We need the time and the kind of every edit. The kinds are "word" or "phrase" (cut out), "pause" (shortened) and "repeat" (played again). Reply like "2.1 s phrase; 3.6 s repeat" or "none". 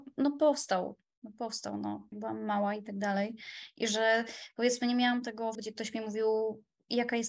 2.1 s word; 5.5 s word